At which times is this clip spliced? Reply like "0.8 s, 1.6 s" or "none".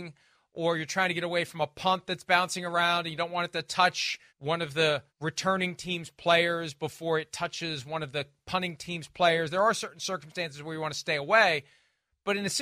4.3 s, 5.1 s